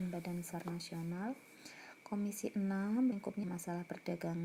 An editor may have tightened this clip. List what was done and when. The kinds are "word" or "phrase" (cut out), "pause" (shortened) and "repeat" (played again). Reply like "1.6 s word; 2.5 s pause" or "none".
3.1 s word; 3.4 s word

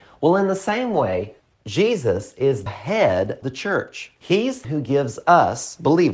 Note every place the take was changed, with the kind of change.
1.4 s pause; 2.7 s word; 3.4 s word; 4.2 s pause; 4.6 s word

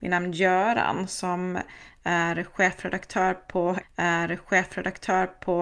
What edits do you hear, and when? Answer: 3.8 s repeat

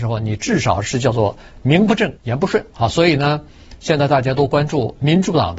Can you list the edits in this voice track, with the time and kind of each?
2.2 s pause

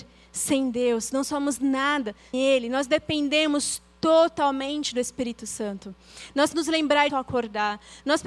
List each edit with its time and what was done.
2.3 s word; 6.5 s word; 7.1 s word

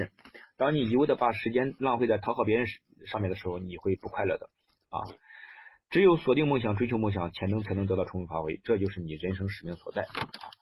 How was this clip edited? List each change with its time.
none

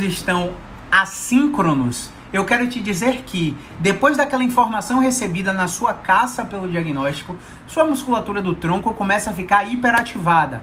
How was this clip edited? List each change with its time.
none

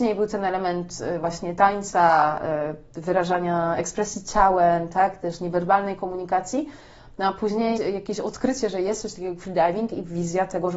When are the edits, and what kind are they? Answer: 7.8 s word

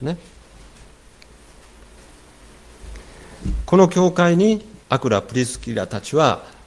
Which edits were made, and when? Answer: 4.8 s pause

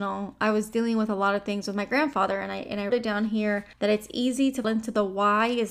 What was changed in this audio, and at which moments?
2.9 s word; 3.7 s pause; 4.6 s word

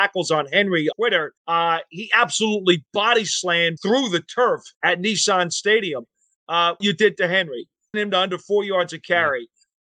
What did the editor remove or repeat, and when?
0.9 s word; 1.4 s pause; 3.8 s word; 4.7 s pause; 6.8 s phrase; 7.9 s word

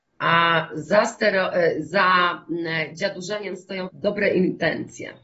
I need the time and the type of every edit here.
3.9 s word

